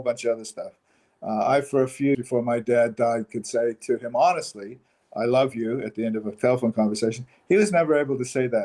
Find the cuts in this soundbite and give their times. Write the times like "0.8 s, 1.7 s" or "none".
2.1 s

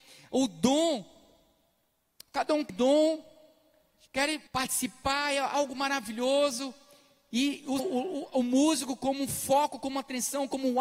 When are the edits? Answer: 2.7 s, 4.5 s, 7.8 s

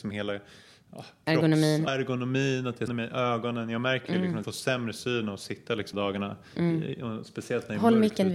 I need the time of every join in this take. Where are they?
1.9 s, 2.9 s, 4.4 s, 5.9 s

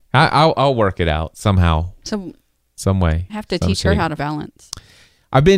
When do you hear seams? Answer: 4.2 s

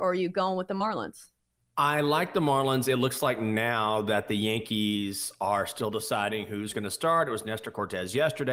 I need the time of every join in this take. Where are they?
1.4 s

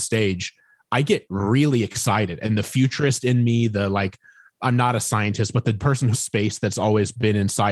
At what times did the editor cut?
6.1 s

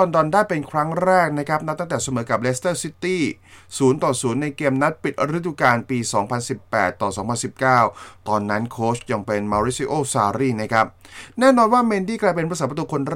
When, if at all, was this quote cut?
none

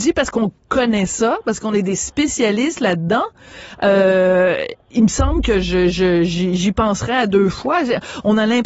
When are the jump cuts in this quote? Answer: none

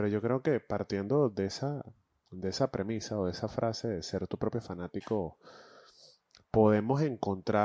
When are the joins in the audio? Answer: none

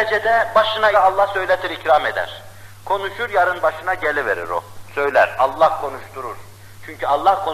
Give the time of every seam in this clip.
0.9 s

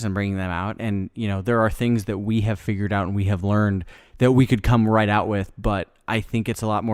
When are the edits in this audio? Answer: none

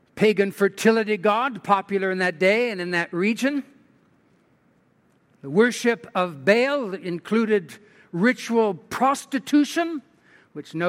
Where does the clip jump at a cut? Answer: none

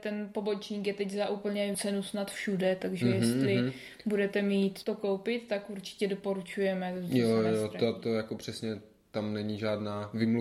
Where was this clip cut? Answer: 1.7 s, 4.8 s

